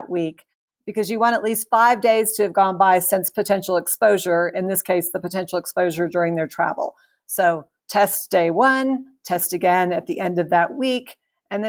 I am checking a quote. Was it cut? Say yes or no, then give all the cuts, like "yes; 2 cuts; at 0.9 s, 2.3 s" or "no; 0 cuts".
no; 0 cuts